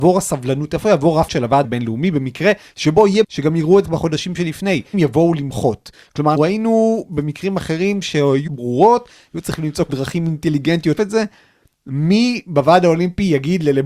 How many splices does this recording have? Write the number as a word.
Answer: nine